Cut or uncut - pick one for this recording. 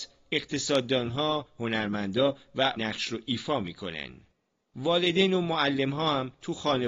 cut